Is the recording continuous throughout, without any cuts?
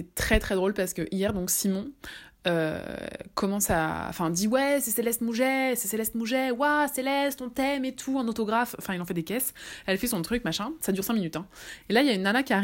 yes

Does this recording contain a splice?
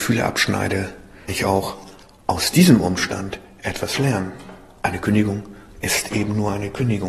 yes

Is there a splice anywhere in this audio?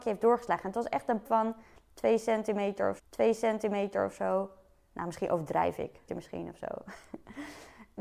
yes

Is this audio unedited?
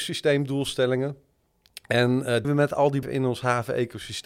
no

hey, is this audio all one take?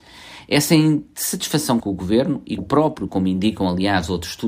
no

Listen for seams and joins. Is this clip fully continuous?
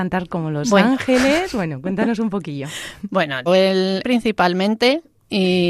no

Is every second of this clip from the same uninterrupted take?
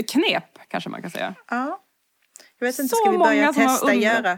yes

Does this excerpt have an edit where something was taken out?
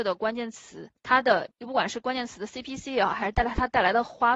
yes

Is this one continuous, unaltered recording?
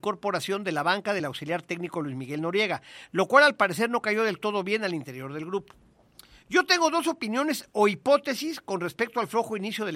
yes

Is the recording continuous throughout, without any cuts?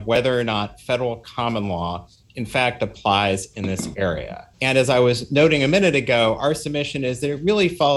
no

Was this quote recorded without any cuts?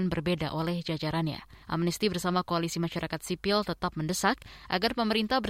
no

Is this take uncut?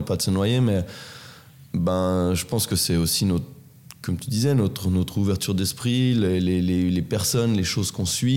no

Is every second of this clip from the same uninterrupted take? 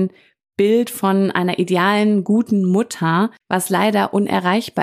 no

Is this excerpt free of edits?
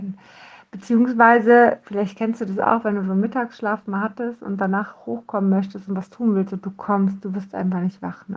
yes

